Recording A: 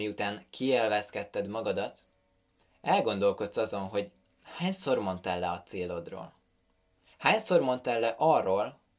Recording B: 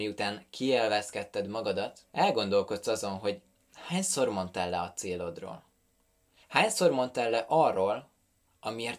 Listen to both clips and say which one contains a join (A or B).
B